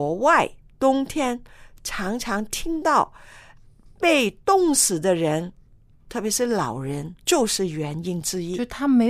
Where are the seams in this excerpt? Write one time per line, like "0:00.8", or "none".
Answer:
0:07.2